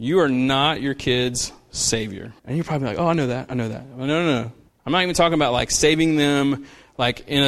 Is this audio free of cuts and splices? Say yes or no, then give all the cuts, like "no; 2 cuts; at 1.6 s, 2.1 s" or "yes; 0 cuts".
no; 2 cuts; at 2.4 s, 4.7 s